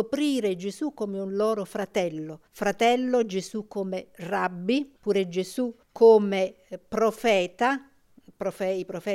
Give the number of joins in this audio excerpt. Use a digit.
3